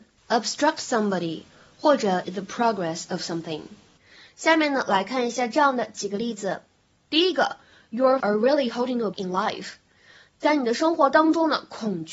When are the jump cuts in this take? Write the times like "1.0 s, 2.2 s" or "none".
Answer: 2.2 s, 8.2 s, 9.1 s